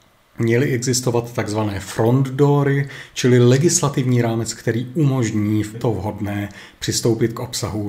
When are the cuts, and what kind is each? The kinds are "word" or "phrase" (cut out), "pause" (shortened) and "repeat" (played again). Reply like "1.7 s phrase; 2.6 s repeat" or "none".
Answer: 5.7 s phrase